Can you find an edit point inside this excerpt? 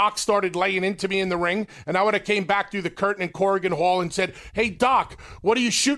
no; 0 cuts

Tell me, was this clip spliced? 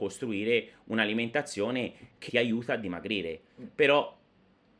yes; 1 cut; at 2.3 s

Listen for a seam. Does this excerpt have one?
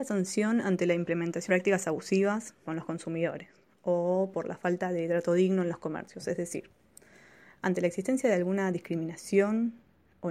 yes; 2 cuts; at 1.5 s, 2.7 s

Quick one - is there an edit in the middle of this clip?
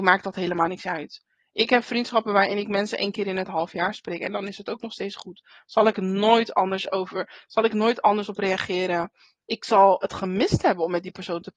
no; 0 cuts

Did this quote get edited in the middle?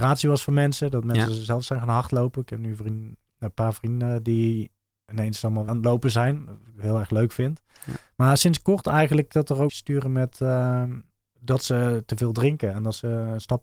yes; 3 cuts; at 5.7 s, 9.7 s, 11.2 s

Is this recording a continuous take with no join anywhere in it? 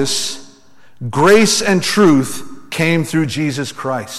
yes; 0 cuts

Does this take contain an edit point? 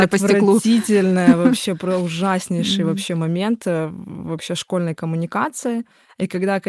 no; 0 cuts

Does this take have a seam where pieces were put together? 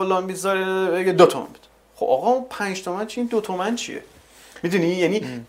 yes; 1 cut; at 1.8 s

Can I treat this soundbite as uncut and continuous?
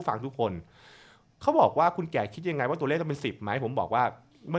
yes; 0 cuts

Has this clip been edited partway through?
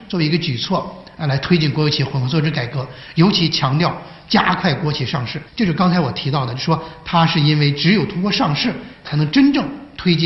yes; 1 cut; at 5.5 s

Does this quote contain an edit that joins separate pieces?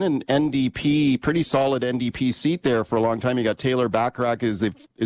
no; 0 cuts

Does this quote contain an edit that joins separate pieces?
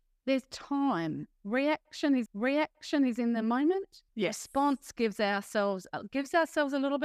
yes; 2 cuts; at 2.3 s, 4.1 s

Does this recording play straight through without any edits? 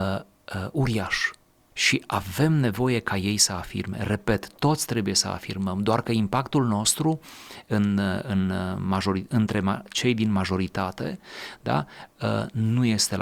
yes; 0 cuts

